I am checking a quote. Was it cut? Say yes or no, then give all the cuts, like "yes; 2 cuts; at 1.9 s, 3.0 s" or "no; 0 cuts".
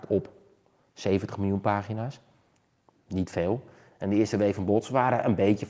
no; 0 cuts